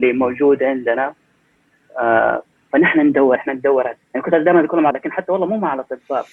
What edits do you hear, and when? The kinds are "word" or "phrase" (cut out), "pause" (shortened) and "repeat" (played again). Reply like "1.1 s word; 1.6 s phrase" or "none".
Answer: 3.4 s word; 4.0 s word; 4.9 s word